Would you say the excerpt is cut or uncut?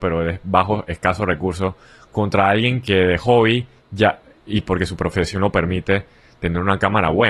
uncut